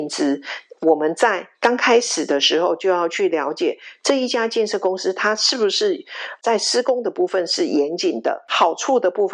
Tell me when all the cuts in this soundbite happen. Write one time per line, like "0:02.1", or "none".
0:01.5